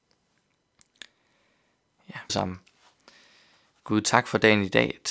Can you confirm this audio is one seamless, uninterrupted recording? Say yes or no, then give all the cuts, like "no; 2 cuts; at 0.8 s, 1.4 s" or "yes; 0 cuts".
no; 1 cut; at 2.3 s